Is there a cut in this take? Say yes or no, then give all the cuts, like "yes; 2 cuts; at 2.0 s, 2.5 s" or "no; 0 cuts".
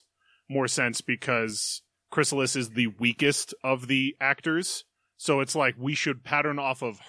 no; 0 cuts